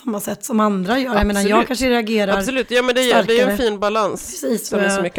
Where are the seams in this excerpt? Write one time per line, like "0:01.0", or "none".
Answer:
none